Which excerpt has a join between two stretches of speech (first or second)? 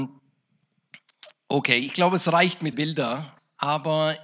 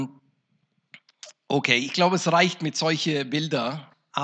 first